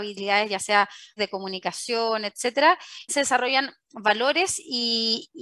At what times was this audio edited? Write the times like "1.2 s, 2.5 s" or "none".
1.2 s, 3.1 s